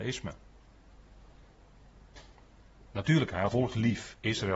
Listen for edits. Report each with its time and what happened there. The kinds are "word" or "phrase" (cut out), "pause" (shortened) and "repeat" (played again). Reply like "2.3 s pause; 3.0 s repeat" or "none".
3.5 s word